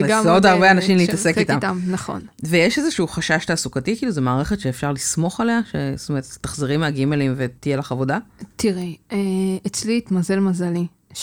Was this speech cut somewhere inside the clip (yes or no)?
yes